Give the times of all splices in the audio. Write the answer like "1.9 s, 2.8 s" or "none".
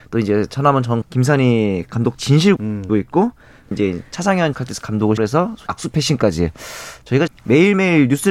1.0 s, 2.2 s, 2.6 s, 2.9 s, 3.7 s, 4.5 s, 5.2 s, 5.7 s, 7.3 s